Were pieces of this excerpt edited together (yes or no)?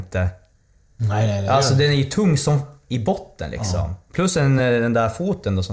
no